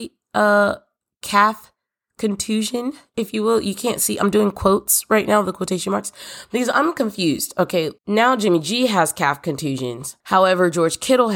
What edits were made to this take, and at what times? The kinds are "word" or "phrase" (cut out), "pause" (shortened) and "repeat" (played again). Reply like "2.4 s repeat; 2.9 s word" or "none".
8.0 s pause; 10.2 s pause